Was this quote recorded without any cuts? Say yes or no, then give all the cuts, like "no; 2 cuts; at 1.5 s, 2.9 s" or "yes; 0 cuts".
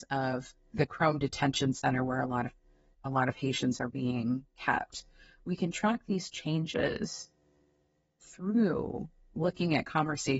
yes; 0 cuts